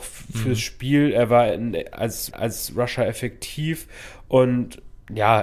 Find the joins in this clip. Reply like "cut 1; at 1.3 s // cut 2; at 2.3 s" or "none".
cut 1; at 2.3 s